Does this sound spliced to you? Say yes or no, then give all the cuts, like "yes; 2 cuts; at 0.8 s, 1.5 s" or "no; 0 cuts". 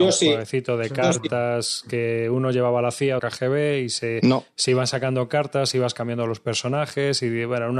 yes; 1 cut; at 3.2 s